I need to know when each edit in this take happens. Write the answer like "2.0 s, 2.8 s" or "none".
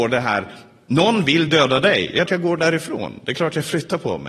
2.3 s